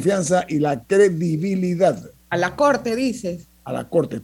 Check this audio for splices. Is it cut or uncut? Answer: uncut